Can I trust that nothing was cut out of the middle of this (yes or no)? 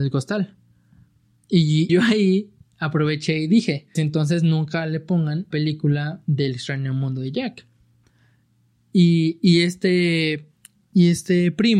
no